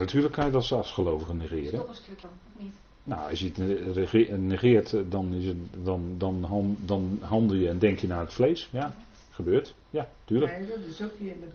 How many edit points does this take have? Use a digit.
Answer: 1